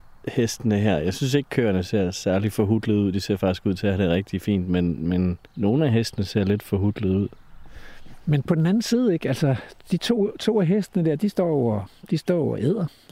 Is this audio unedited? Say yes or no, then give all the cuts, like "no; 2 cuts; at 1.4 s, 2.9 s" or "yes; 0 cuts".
no; 1 cut; at 5.5 s